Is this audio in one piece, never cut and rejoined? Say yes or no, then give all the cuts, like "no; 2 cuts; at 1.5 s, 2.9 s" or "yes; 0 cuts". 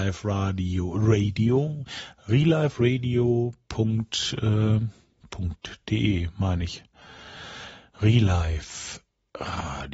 no; 1 cut; at 5.2 s